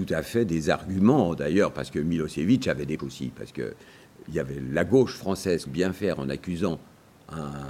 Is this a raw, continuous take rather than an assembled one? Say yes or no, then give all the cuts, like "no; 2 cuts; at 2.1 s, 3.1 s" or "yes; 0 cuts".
no; 2 cuts; at 3.0 s, 5.7 s